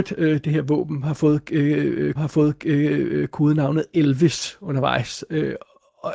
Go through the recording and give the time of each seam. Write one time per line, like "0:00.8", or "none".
0:02.2